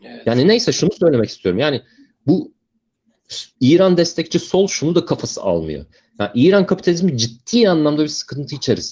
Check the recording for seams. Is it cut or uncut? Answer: cut